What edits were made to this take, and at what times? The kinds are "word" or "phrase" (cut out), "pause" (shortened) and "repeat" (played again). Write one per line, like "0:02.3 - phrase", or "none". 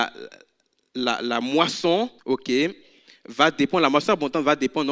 0:02.2 - pause